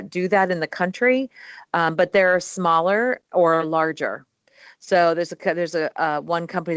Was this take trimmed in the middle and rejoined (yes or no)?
no